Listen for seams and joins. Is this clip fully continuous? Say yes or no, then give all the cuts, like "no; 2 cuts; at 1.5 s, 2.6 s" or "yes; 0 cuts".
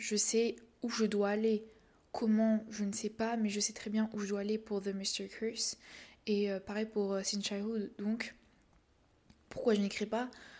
yes; 0 cuts